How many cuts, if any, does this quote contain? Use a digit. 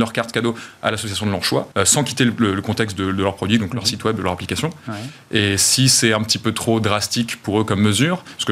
1